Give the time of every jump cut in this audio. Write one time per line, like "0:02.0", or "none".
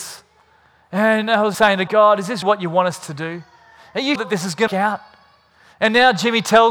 0:01.5
0:01.9
0:02.4
0:04.2
0:04.7